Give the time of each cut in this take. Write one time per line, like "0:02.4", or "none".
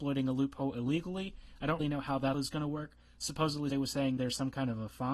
0:01.8
0:02.3
0:03.7
0:04.2